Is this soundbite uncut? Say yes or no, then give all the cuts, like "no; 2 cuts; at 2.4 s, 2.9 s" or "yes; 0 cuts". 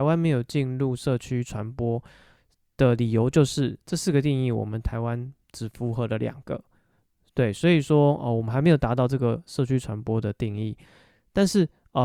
yes; 0 cuts